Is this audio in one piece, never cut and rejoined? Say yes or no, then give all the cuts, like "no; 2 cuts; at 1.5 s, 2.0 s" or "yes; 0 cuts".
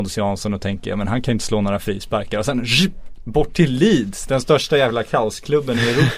yes; 0 cuts